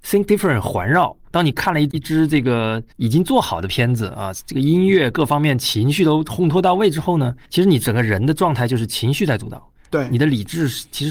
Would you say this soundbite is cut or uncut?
cut